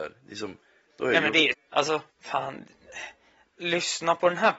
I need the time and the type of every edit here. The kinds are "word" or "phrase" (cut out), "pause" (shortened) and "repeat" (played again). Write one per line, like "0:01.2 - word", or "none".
0:01.5 - word
0:02.1 - pause